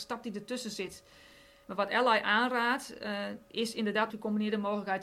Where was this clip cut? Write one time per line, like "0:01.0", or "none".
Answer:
0:04.1